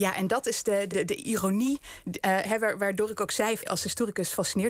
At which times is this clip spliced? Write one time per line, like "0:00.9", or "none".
0:00.9
0:03.6